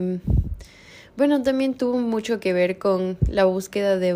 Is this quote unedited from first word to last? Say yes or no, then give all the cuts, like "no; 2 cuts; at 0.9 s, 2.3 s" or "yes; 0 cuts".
yes; 0 cuts